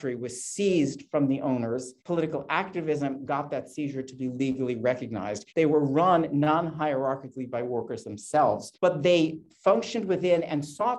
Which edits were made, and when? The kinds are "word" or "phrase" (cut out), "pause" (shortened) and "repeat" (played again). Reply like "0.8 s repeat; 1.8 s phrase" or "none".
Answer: 2.0 s pause; 5.5 s pause; 8.7 s pause